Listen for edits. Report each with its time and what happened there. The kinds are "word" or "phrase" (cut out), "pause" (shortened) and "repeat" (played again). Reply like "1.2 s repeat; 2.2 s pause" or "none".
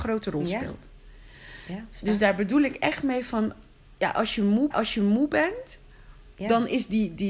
4.7 s repeat